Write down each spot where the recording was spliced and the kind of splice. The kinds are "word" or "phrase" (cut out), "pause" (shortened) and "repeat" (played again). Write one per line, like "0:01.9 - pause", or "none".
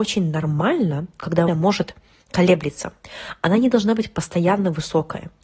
0:01.5 - word